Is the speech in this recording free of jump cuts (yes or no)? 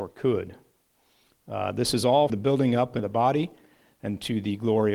no